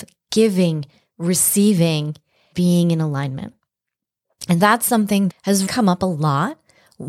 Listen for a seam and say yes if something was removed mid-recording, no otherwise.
yes